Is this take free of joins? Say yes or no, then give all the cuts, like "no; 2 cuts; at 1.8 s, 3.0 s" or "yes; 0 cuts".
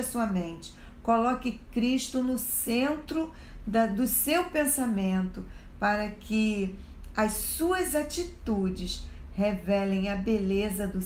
yes; 0 cuts